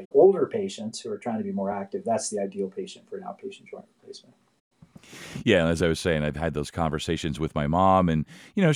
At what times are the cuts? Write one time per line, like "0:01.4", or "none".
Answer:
none